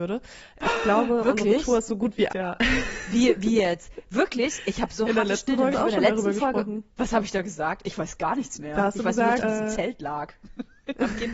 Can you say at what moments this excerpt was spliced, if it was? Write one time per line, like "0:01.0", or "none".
0:02.3
0:05.7
0:06.9
0:09.4

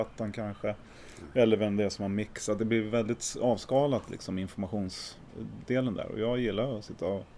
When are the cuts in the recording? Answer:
none

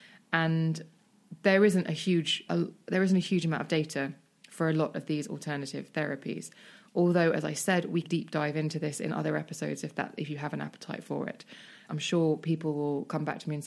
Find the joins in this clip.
0:02.5
0:08.0
0:11.9

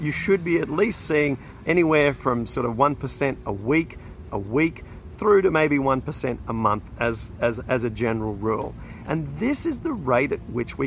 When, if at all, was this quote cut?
0:01.6
0:04.3

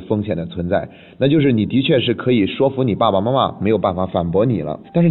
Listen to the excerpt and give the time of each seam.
none

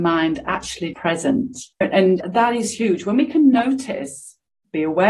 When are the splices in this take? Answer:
0:00.9
0:01.7

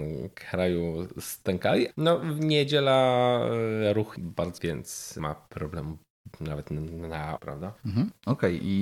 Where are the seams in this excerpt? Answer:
0:01.9
0:04.2
0:04.6
0:05.2
0:06.3
0:07.4

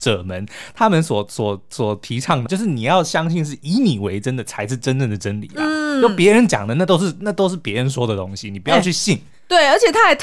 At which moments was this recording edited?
0:02.5

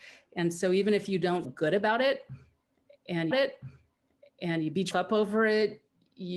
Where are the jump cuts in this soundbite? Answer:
0:01.4
0:03.3
0:04.9

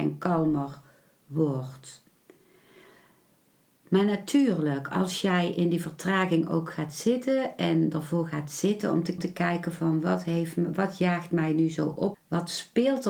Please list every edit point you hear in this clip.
0:09.2
0:12.1

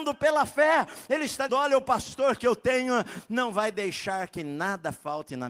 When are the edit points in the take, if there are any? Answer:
0:01.5

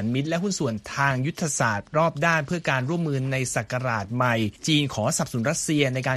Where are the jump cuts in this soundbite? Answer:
0:04.6

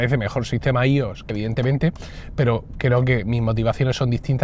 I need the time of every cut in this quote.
0:01.3

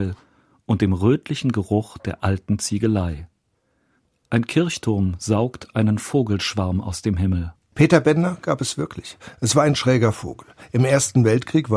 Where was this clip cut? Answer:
none

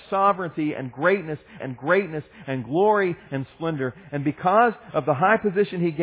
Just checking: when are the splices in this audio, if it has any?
0:01.6

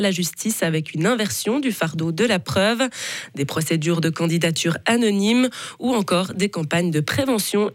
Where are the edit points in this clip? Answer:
none

